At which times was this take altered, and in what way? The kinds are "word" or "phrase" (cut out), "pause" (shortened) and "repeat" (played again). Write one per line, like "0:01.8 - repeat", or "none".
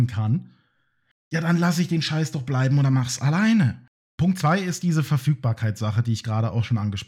0:03.9 - pause